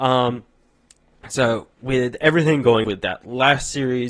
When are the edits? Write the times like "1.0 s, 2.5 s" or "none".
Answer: 2.8 s